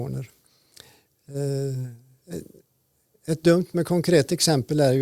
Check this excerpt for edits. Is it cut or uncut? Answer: uncut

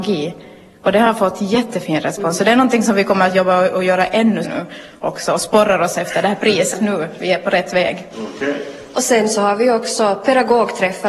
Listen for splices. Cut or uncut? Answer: cut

